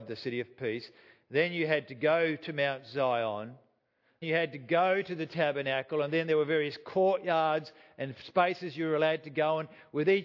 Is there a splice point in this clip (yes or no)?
yes